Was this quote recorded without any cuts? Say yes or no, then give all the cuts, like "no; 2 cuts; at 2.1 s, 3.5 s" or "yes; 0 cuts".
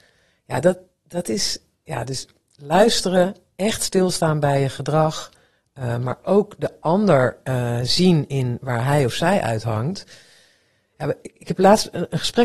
yes; 0 cuts